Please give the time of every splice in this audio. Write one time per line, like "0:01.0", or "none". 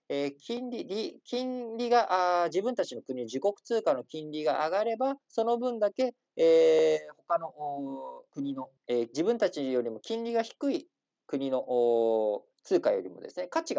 0:05.2
0:08.3
0:08.8
0:12.5